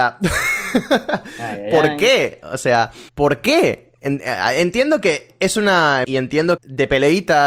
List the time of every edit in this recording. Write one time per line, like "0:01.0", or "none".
0:03.1
0:06.0
0:06.6